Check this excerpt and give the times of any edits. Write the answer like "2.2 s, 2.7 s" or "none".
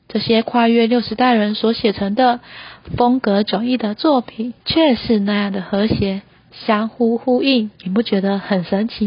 4.6 s, 7.8 s